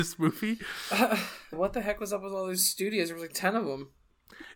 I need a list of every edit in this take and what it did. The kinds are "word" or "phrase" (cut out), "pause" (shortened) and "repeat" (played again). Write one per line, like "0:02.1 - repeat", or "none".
0:01.5 - word